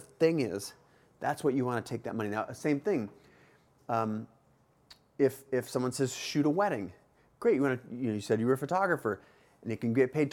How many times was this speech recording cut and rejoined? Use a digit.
0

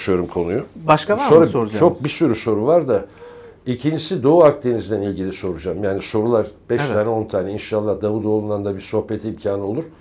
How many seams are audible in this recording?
0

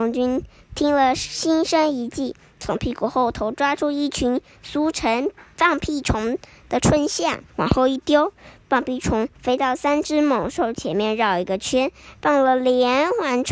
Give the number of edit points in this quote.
2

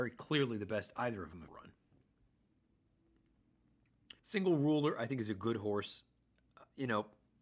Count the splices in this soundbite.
2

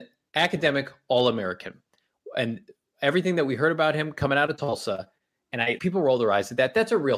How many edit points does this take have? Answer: 1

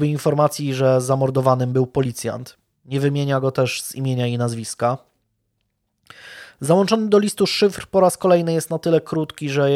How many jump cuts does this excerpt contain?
0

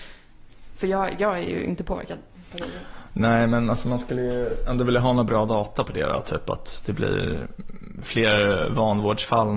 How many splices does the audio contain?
0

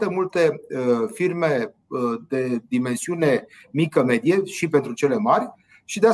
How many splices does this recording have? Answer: 0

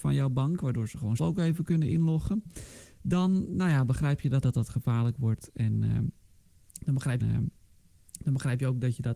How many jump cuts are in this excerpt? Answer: 3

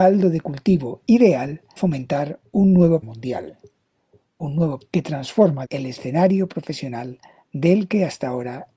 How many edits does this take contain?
4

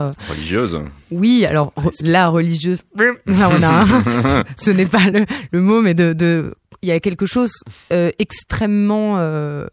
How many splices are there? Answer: 0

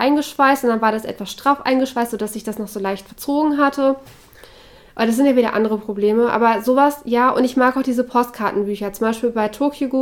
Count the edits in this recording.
0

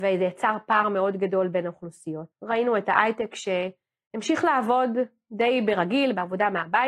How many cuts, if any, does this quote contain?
1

